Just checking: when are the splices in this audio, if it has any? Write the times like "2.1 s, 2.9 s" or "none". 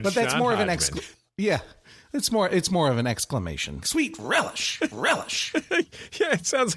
1.3 s, 3.8 s, 4.9 s